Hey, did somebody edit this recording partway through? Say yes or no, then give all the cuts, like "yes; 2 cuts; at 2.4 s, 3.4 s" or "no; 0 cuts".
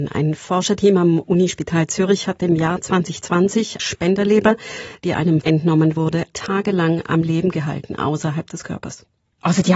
yes; 3 cuts; at 3.8 s, 5.4 s, 6.3 s